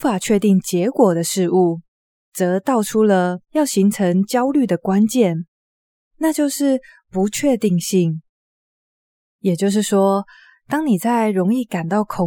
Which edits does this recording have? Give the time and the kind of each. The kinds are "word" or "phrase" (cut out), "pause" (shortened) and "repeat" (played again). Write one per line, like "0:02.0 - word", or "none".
none